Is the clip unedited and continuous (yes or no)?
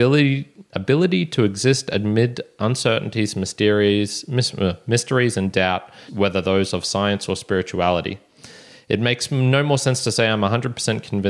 no